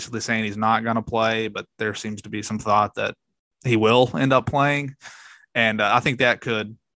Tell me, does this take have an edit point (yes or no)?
no